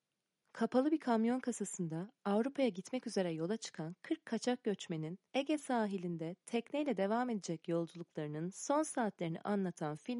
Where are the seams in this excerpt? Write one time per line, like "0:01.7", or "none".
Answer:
0:05.3